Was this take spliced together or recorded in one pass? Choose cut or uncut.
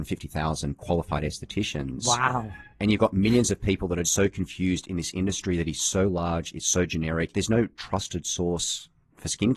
cut